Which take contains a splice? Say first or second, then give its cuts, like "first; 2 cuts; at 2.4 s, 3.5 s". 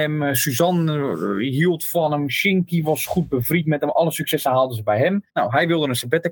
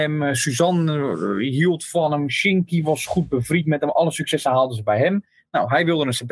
first; 1 cut; at 5.3 s